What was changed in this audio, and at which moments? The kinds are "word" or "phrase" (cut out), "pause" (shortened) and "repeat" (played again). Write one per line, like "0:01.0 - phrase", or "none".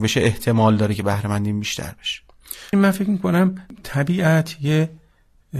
0:02.7 - word